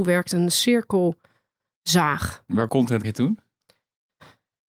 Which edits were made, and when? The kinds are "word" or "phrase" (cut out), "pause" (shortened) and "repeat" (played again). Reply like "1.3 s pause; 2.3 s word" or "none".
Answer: 2.7 s word; 3.0 s word